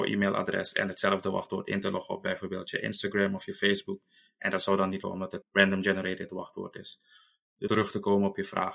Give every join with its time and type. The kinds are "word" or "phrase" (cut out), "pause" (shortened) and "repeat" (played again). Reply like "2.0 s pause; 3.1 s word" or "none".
5.0 s word; 5.4 s word; 7.7 s word